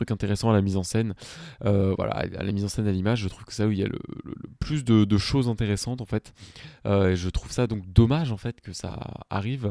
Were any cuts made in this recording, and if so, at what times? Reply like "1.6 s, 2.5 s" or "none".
none

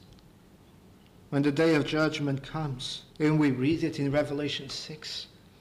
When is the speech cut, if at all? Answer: 3.1 s

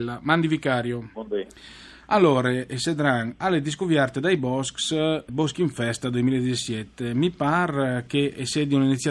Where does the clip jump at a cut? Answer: none

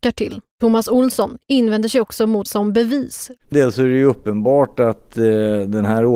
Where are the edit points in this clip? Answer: 2.5 s, 3.5 s

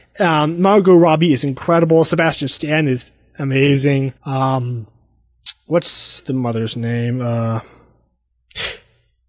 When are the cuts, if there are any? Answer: 4.2 s

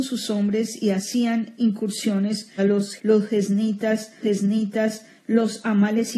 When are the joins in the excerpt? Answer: 2.6 s, 3.0 s, 4.2 s

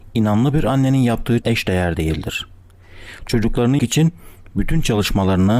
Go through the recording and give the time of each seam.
1.4 s, 3.8 s

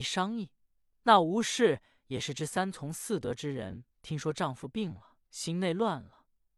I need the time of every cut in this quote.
3.9 s, 5.2 s

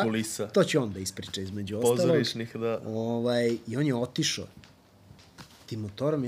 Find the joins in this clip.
none

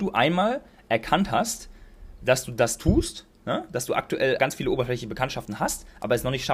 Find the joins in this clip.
4.4 s

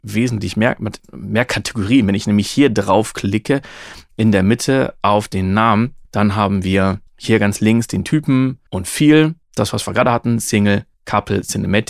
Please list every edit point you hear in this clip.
6.0 s, 7.1 s, 8.7 s, 9.4 s, 10.9 s

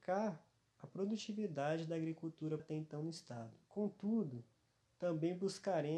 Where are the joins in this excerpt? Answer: 2.6 s, 3.6 s

